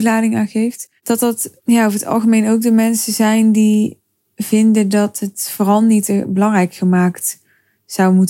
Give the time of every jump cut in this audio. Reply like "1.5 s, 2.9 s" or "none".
1.0 s, 1.6 s